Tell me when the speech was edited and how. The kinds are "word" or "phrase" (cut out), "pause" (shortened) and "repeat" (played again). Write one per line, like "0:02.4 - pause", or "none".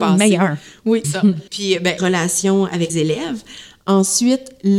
0:01.0 - word
0:01.5 - pause
0:02.0 - phrase
0:02.9 - word